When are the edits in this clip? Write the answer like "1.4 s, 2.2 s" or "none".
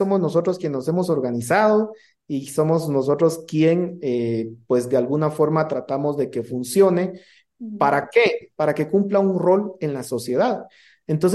none